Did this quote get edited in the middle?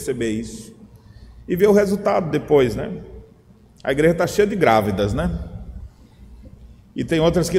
no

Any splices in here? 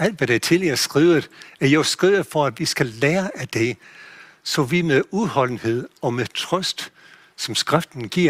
no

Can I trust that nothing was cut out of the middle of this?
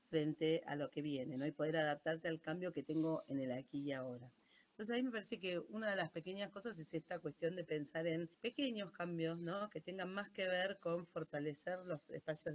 no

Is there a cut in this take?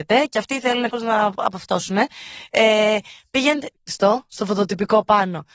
yes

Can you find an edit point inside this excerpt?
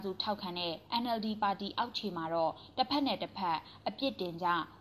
no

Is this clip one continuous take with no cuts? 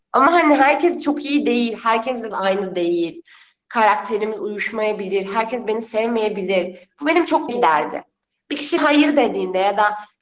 no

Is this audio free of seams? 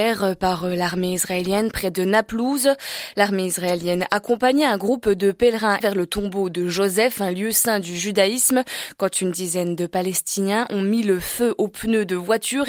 no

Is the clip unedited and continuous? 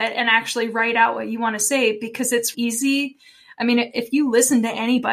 no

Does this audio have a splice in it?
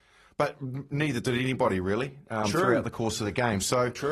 no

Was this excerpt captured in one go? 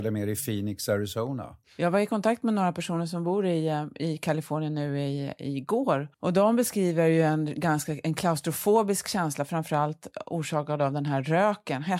no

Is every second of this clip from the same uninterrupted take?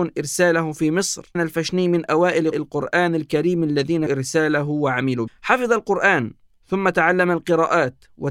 no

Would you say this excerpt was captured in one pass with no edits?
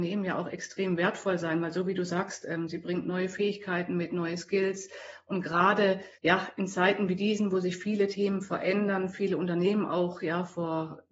no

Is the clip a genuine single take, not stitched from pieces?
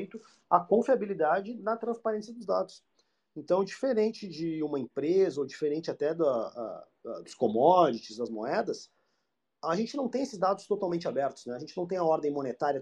yes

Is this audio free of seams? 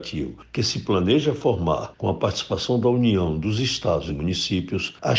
no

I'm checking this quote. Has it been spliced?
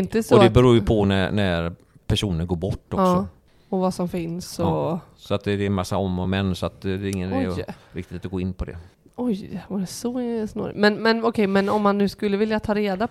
no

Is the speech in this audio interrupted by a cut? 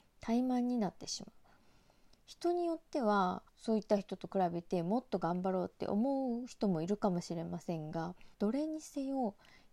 yes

